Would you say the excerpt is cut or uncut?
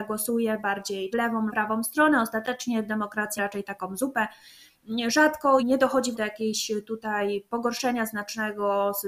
cut